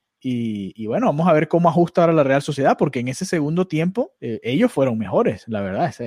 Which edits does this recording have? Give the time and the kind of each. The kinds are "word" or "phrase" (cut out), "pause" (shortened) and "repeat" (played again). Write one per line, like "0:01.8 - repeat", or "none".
0:04.2 - pause